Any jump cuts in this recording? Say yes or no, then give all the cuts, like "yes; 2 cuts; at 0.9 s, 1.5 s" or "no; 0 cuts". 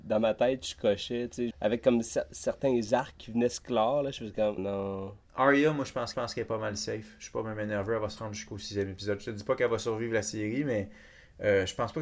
yes; 5 cuts; at 1.5 s, 3.2 s, 4.6 s, 5.3 s, 6.1 s